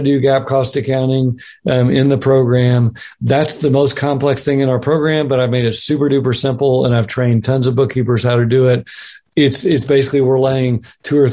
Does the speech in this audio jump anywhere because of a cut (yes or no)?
no